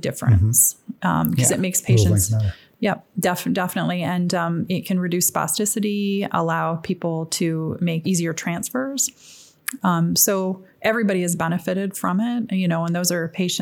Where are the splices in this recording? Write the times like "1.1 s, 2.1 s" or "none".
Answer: 8.0 s